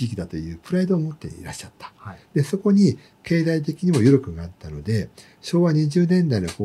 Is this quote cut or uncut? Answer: uncut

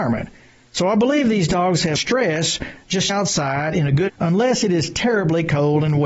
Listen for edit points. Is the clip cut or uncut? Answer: cut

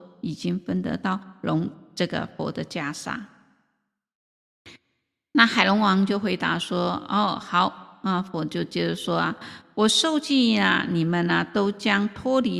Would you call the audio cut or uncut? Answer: uncut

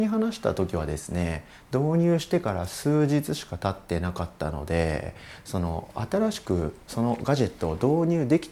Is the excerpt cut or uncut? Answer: uncut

